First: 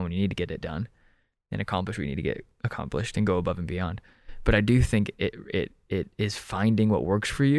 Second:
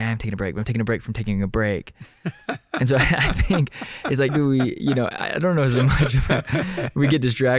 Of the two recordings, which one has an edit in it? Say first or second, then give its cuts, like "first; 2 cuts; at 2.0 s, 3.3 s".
second; 1 cut; at 4.3 s